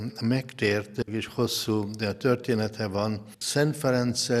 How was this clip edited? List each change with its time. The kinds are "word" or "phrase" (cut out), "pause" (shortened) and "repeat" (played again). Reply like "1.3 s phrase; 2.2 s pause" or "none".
1.1 s word